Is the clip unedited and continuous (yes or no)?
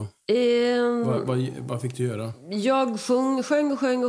yes